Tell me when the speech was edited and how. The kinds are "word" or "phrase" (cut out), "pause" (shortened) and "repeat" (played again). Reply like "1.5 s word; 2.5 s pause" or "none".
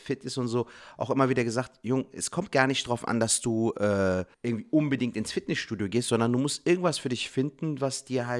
4.3 s pause